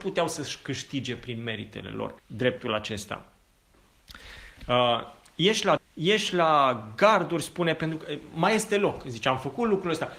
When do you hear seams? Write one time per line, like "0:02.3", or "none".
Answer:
0:02.2
0:05.8